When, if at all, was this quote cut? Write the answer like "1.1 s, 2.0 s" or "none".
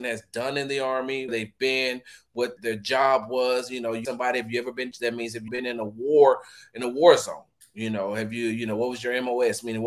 1.3 s, 2.6 s, 4.0 s, 4.9 s, 5.5 s